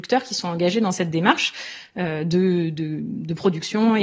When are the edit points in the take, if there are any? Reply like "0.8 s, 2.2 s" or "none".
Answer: none